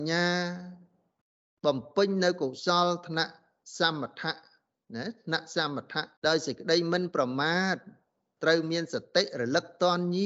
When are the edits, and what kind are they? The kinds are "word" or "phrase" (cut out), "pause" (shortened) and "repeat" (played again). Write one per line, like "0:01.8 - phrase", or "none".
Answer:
0:06.2 - pause

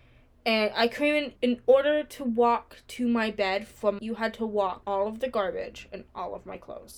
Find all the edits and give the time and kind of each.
0:01.4 - word
0:04.0 - phrase
0:04.8 - word

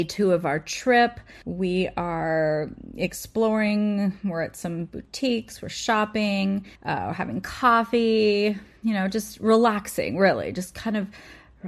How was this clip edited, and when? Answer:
0:01.4 - pause
0:06.8 - pause

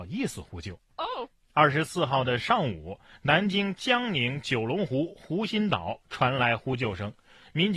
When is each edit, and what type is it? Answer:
none

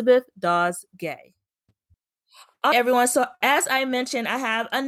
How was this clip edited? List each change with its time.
0:02.7 - word

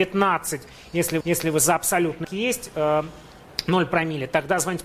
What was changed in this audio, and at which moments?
0:01.2 - repeat
0:02.2 - phrase

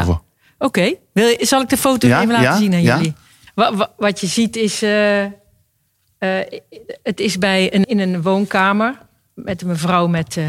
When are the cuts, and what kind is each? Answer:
0:07.8 - word

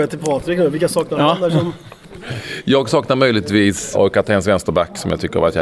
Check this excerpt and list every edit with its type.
0:03.9 - word

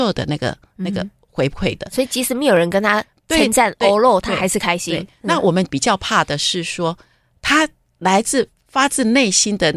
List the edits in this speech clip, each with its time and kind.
none

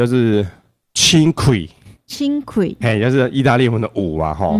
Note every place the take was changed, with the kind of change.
none

